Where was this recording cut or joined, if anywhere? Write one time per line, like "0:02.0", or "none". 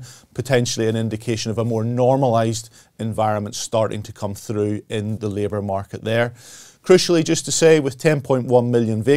0:05.2